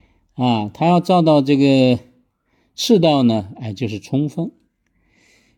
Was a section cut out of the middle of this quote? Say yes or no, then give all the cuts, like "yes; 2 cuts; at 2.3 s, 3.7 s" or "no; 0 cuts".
no; 0 cuts